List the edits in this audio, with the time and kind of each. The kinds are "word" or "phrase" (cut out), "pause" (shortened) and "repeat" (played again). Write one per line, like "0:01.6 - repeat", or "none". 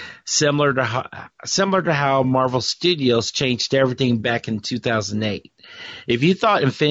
none